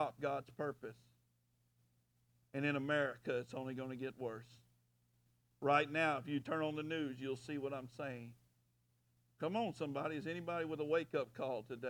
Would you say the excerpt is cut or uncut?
uncut